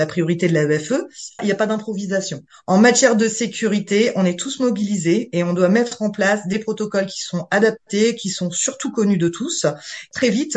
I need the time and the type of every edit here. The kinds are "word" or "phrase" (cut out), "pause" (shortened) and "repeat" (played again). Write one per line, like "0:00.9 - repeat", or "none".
none